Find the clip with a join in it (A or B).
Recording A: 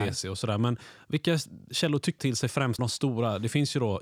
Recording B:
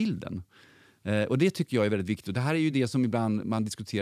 A